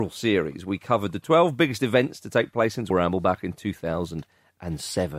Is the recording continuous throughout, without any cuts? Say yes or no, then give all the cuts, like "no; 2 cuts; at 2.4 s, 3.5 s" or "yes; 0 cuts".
no; 1 cut; at 2.9 s